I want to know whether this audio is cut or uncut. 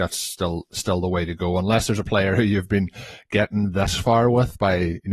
uncut